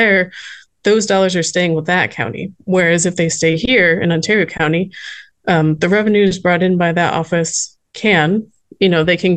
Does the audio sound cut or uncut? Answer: cut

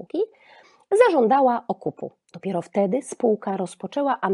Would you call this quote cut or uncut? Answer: uncut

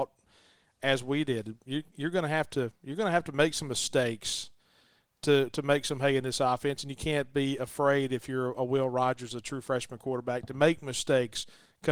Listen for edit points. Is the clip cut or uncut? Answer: uncut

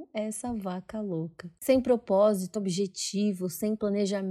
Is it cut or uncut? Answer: cut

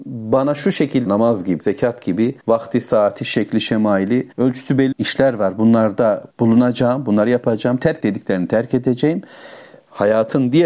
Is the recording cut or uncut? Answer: cut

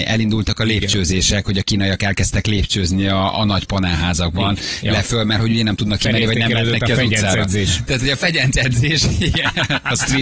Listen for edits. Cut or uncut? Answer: uncut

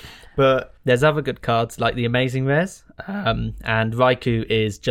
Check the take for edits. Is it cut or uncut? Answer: uncut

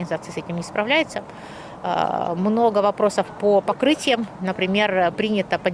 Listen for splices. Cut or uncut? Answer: uncut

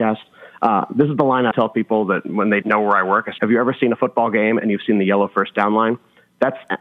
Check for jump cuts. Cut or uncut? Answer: cut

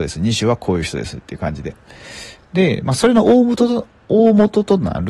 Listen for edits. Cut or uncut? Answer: uncut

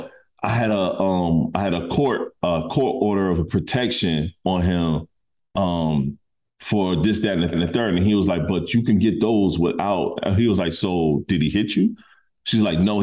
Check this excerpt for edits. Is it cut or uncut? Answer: cut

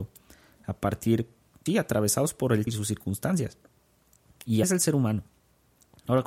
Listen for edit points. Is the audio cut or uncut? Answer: cut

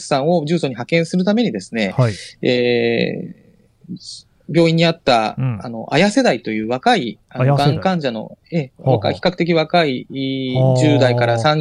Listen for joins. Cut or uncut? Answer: uncut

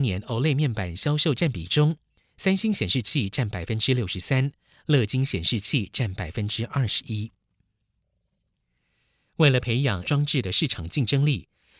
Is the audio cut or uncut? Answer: cut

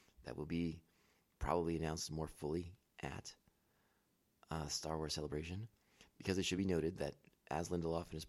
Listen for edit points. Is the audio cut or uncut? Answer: uncut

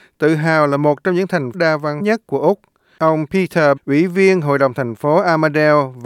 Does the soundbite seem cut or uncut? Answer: cut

